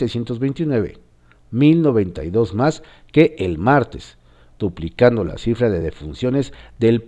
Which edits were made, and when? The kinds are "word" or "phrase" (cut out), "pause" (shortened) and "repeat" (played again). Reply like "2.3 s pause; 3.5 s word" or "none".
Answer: none